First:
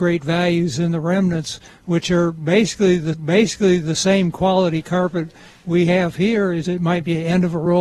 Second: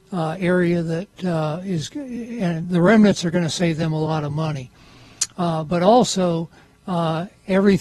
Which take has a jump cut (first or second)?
first